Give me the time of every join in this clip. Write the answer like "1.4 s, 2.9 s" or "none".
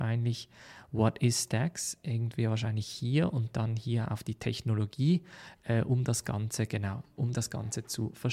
none